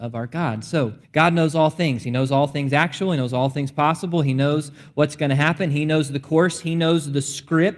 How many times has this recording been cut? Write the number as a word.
one